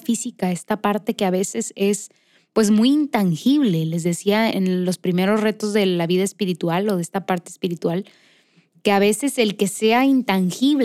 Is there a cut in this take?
yes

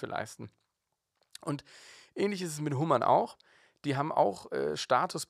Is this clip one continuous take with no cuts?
yes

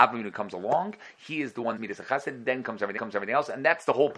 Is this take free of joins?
no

